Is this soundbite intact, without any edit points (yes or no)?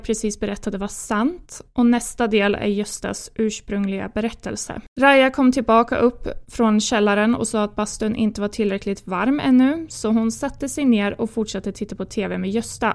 no